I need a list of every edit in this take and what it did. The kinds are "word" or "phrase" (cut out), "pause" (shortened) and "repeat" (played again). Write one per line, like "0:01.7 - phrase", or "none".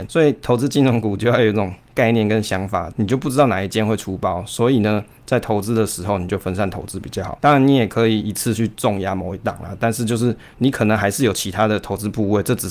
none